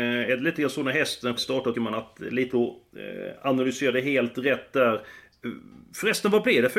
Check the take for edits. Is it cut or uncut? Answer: cut